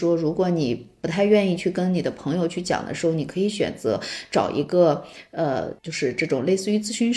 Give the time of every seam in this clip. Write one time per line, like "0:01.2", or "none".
0:05.8